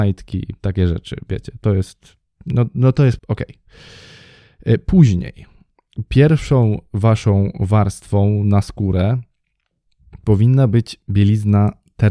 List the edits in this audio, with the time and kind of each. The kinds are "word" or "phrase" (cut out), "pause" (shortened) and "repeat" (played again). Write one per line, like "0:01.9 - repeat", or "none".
0:02.3 - pause
0:03.2 - word